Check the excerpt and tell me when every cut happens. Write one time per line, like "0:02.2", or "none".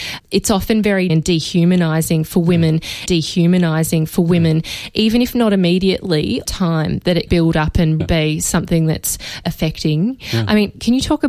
0:01.1
0:03.1
0:06.4
0:07.3
0:08.0
0:09.4